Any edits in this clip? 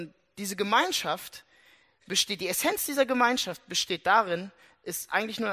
no; 0 cuts

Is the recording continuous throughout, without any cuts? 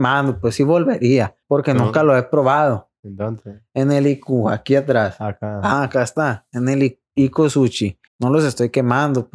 no; 2 cuts; at 1.4 s, 8.1 s

